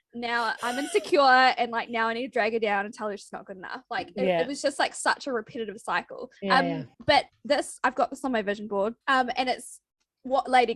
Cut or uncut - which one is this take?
cut